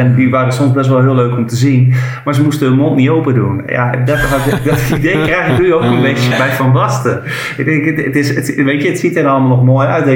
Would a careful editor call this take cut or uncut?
cut